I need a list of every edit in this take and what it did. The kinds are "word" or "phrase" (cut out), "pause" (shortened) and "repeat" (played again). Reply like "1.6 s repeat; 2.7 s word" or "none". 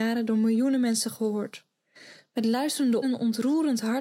3.0 s word